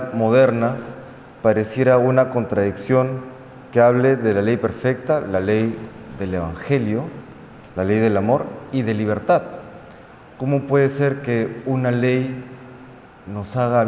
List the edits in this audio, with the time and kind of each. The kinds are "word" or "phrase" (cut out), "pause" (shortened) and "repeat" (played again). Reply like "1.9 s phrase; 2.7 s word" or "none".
none

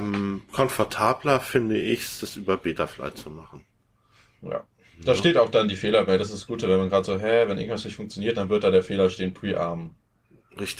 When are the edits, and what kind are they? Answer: none

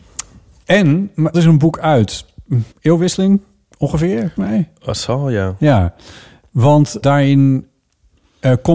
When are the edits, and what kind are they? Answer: 1.3 s word; 2.7 s pause; 4.4 s word; 7.0 s word

